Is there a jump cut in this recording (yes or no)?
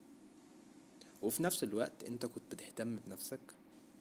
yes